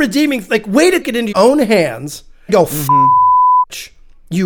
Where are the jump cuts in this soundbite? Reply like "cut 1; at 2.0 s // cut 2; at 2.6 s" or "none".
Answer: cut 1; at 1.0 s // cut 2; at 1.3 s // cut 3; at 2.5 s